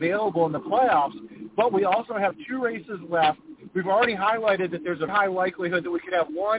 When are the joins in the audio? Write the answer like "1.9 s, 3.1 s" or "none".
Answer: 5.1 s